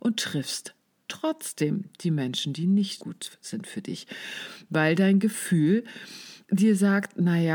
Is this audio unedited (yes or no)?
no